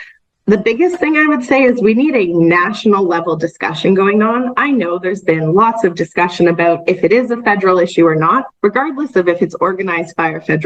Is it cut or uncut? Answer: cut